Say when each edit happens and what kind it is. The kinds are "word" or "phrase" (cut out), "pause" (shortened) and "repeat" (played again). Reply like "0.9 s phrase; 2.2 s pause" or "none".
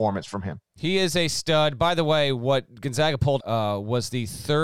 3.4 s word